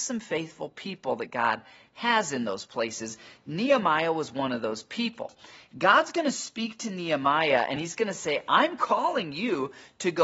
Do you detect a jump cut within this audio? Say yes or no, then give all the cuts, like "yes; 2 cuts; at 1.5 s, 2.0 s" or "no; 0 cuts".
no; 0 cuts